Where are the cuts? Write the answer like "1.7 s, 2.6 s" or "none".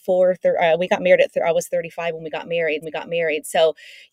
2.8 s